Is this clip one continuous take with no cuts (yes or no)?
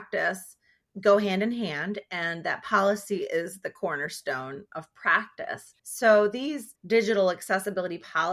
no